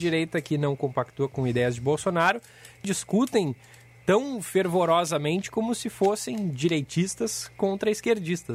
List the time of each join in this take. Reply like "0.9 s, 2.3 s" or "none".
2.8 s